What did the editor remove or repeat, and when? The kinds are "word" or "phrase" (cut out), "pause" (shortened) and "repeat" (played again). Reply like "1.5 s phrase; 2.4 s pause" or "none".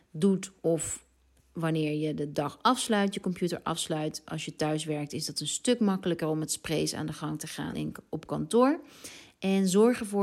1.2 s pause; 7.7 s word